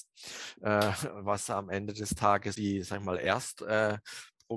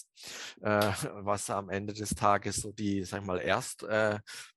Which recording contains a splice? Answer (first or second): first